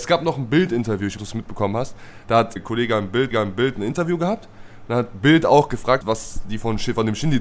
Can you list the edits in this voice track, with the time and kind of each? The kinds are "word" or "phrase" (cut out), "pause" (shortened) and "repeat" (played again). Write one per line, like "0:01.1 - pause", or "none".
0:01.2 - phrase
0:02.6 - word
0:03.3 - repeat
0:06.0 - word

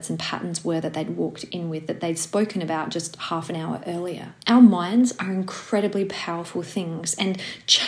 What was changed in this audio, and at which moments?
0:04.4 - pause

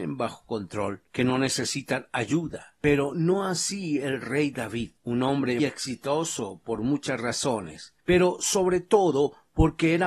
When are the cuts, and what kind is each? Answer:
0:01.1 - pause
0:05.0 - pause
0:05.6 - word
0:08.0 - pause

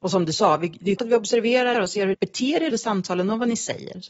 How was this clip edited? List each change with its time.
0:01.0 - word
0:01.7 - word
0:02.1 - word
0:02.7 - word

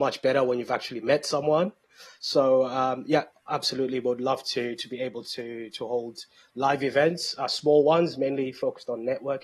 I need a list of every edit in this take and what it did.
none

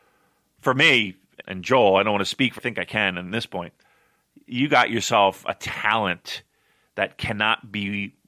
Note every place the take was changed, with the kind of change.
0:01.4 - word
0:02.6 - phrase

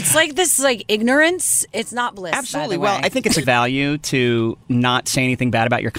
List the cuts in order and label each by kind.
0:03.4 - word
0:04.6 - word

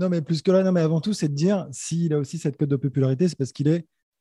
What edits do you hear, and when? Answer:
none

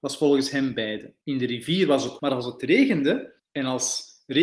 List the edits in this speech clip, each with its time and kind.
0:01.2 - pause
0:02.2 - word
0:03.4 - pause

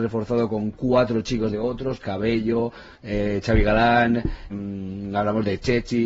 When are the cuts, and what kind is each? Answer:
0:01.5 - phrase
0:02.9 - pause
0:04.5 - word

